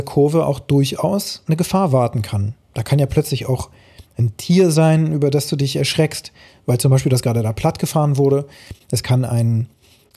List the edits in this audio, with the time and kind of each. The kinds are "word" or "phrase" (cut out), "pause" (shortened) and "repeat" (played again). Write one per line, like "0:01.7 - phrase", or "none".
none

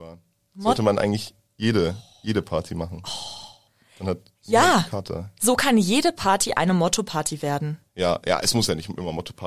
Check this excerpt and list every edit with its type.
0:03.7 - pause
0:07.9 - pause

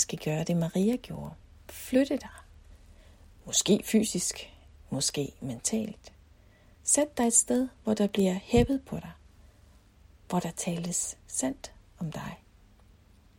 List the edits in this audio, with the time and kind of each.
none

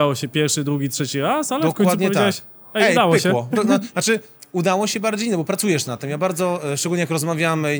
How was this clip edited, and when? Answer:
none

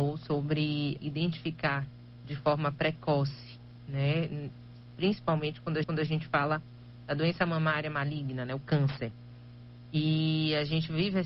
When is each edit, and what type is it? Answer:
0:01.0 - phrase
0:05.8 - repeat

